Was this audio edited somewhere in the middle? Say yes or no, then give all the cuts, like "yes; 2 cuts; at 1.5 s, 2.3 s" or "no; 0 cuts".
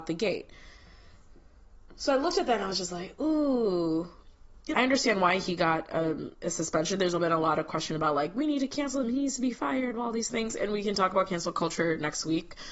yes; 1 cut; at 4.7 s